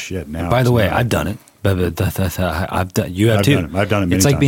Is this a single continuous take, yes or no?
yes